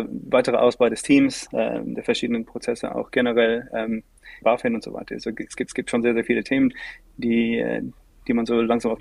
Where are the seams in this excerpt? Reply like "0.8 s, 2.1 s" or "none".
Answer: 4.4 s, 5.7 s